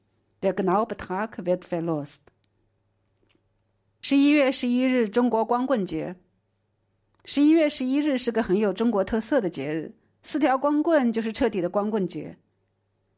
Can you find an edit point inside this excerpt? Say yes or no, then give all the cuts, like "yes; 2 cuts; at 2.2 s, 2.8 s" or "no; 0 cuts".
no; 0 cuts